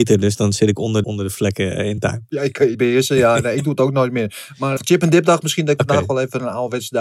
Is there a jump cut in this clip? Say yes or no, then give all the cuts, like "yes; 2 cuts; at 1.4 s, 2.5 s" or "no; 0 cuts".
yes; 4 cuts; at 1.0 s, 2.0 s, 2.7 s, 4.8 s